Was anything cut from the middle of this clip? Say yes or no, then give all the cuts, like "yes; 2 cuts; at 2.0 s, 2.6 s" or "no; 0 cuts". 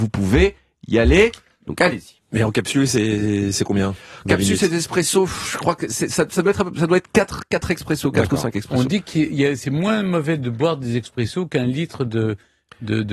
no; 0 cuts